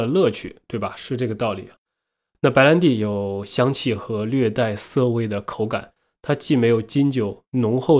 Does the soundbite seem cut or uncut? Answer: uncut